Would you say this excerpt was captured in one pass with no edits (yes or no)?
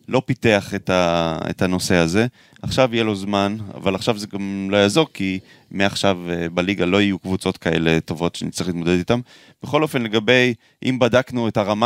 yes